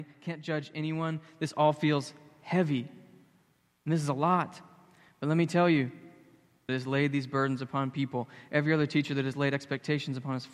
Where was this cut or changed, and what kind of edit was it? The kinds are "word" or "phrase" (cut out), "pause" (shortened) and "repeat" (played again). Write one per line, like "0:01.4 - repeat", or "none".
0:06.7 - phrase